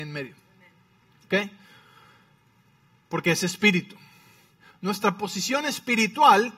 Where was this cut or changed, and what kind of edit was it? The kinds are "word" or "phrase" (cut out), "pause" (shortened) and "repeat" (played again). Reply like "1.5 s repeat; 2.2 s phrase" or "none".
none